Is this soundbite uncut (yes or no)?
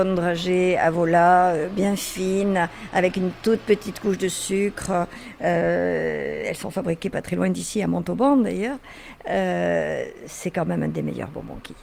yes